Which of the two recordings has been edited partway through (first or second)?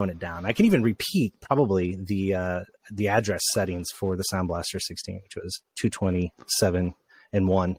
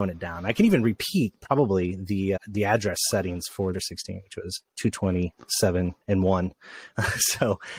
second